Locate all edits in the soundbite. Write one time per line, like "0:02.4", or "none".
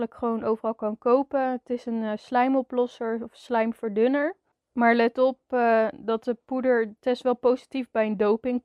none